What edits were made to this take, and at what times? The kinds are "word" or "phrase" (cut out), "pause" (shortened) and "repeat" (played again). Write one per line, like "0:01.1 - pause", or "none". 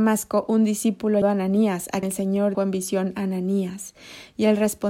0:01.2 - word
0:02.0 - word
0:02.5 - word